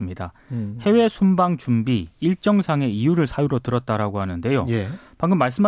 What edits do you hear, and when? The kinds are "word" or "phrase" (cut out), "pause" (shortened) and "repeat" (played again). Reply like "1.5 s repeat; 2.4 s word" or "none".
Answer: none